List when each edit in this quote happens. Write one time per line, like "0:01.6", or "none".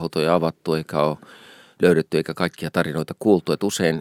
none